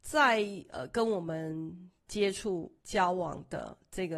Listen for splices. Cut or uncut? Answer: cut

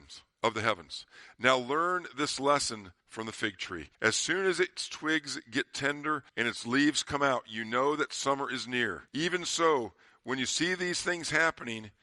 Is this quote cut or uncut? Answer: cut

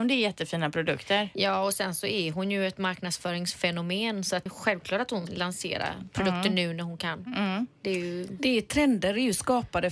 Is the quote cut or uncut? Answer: cut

